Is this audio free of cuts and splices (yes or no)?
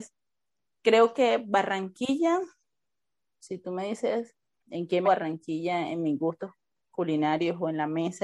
no